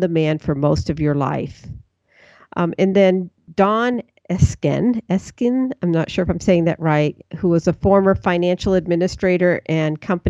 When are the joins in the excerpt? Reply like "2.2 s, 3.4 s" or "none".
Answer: none